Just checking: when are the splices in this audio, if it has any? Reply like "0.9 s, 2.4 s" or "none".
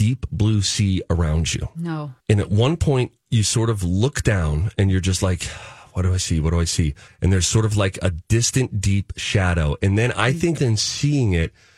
2.2 s, 7.1 s, 10.6 s